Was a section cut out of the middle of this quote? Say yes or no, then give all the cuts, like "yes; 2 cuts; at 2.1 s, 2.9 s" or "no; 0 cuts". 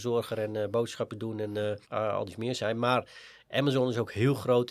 yes; 1 cut; at 1.8 s